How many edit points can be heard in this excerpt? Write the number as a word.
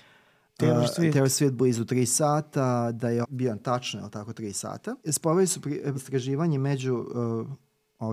three